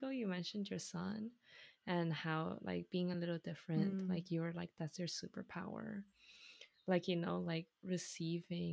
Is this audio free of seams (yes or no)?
yes